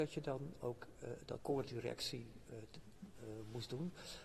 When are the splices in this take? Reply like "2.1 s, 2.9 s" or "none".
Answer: 1.4 s